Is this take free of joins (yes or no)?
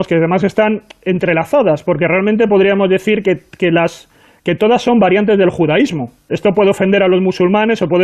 yes